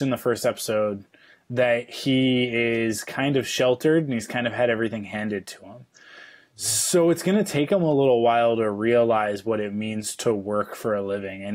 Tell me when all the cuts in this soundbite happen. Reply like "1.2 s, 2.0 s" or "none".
none